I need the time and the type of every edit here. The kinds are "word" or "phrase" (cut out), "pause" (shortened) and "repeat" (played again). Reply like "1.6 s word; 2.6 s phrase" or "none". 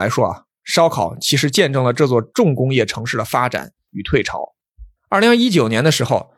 5.0 s pause